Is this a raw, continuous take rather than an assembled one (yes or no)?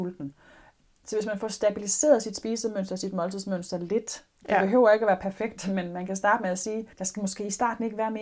no